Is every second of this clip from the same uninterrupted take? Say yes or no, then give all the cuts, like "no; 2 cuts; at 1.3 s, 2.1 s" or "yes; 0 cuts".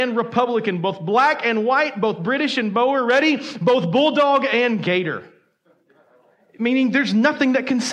yes; 0 cuts